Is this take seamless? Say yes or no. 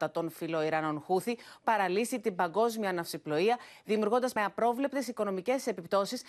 no